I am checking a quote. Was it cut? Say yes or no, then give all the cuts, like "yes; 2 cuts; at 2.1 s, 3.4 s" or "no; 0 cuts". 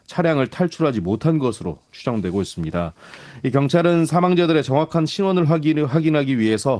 no; 0 cuts